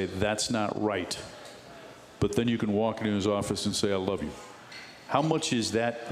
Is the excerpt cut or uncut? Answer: uncut